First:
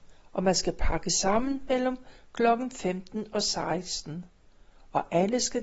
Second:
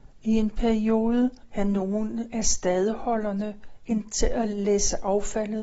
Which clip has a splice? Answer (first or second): second